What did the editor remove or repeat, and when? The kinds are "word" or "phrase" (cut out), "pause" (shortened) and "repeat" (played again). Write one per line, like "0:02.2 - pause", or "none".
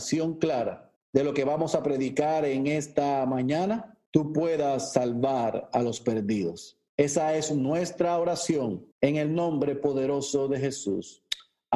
0:01.0 - pause
0:04.1 - pause
0:06.9 - pause
0:08.9 - pause